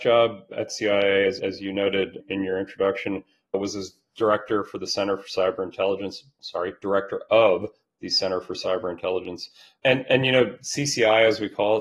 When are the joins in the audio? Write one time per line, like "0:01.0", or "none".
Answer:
none